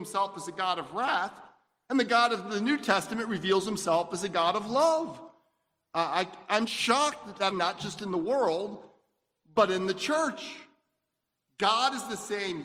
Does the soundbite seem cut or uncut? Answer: cut